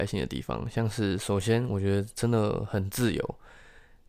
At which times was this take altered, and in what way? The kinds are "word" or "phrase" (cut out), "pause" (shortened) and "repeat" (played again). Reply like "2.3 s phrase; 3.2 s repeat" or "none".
none